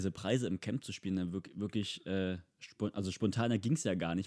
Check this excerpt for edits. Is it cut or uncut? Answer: uncut